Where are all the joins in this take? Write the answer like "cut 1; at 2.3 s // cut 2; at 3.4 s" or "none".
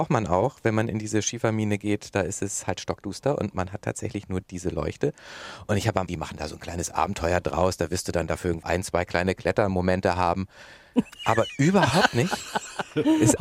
cut 1; at 4.4 s // cut 2; at 6.1 s // cut 3; at 8.6 s